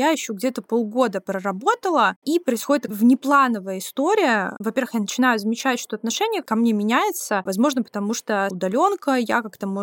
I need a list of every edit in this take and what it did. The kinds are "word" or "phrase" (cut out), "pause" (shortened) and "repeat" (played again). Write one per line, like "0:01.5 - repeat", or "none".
0:02.9 - word
0:06.4 - word
0:08.5 - word